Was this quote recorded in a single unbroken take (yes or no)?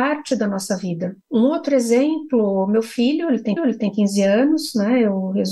no